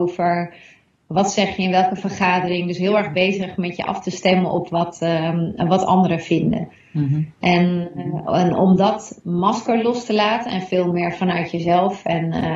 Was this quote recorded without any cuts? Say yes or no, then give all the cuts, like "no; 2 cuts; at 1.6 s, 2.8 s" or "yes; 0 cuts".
yes; 0 cuts